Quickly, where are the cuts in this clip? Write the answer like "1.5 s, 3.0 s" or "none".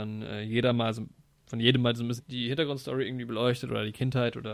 2.2 s